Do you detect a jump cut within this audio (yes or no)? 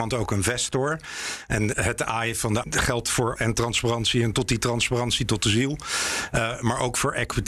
yes